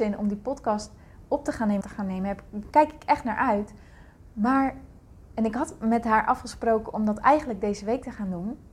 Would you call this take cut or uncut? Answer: cut